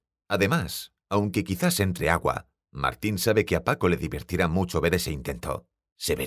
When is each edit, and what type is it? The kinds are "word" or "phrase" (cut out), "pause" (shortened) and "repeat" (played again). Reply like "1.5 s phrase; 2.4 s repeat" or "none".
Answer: none